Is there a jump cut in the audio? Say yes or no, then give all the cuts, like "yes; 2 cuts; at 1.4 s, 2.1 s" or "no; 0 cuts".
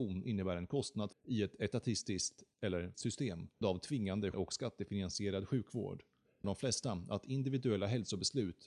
yes; 5 cuts; at 1.1 s, 2.9 s, 3.6 s, 4.3 s, 6.4 s